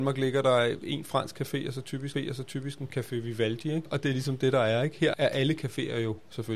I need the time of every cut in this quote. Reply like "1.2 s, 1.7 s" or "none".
2.1 s